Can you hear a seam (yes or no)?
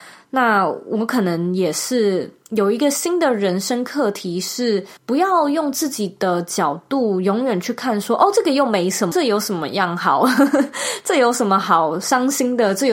yes